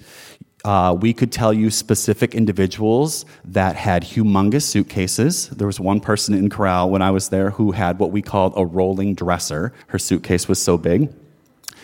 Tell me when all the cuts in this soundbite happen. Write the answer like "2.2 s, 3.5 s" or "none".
9.8 s